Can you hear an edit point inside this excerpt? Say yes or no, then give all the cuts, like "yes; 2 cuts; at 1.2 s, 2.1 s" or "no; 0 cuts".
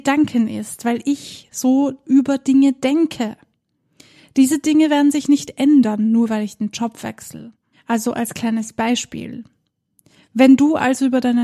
no; 0 cuts